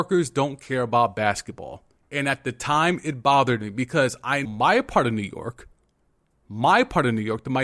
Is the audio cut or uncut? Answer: cut